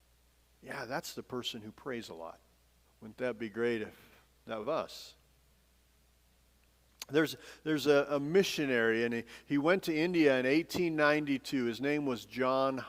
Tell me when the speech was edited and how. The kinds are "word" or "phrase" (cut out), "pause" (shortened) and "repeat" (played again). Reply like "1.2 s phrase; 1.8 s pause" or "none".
2.8 s pause; 4.6 s phrase